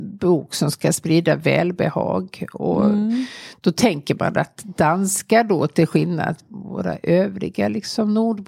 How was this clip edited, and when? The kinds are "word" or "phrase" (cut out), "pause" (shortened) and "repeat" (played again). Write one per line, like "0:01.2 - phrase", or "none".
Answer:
0:06.4 - word